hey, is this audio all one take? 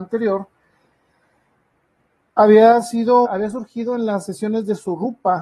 no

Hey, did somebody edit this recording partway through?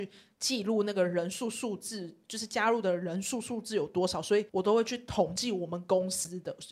yes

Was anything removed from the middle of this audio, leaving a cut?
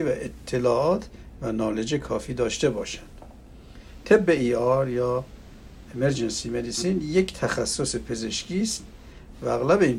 no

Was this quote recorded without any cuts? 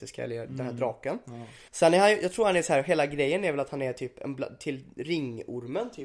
no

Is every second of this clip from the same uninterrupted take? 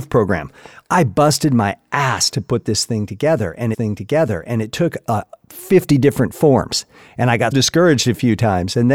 no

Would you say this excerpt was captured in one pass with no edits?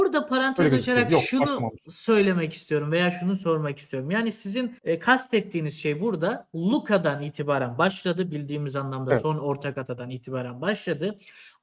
no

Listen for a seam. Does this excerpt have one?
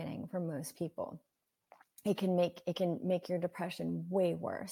no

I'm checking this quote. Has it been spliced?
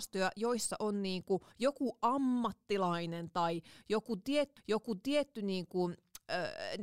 yes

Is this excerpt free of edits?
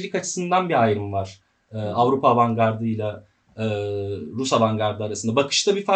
yes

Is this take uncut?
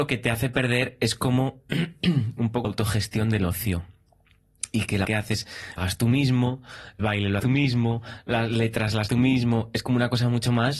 no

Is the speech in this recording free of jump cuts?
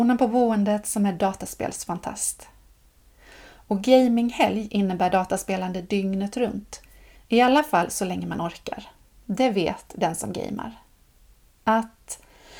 yes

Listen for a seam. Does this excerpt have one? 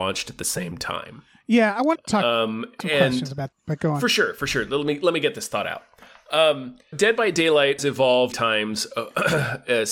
yes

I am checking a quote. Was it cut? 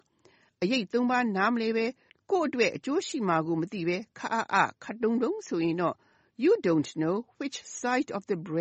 no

